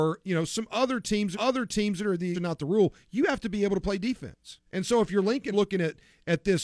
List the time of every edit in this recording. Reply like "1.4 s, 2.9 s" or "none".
1.3 s, 2.3 s, 4.7 s, 5.5 s